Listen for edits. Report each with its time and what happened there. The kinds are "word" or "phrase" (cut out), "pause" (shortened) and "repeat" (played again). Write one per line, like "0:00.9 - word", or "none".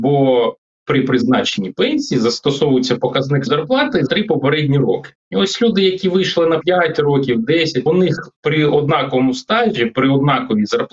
0:03.5 - word
0:04.1 - word
0:05.2 - pause
0:06.6 - word
0:07.9 - phrase